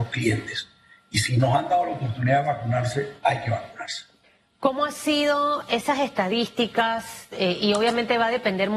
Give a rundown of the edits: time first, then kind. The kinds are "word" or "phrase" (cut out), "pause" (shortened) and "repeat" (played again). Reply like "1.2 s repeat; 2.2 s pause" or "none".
4.2 s pause